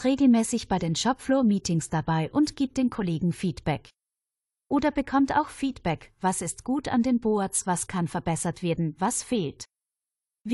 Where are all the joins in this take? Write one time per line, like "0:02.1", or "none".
none